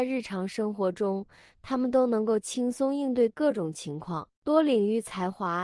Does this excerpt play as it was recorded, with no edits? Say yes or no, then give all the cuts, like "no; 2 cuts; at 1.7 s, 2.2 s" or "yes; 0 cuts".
yes; 0 cuts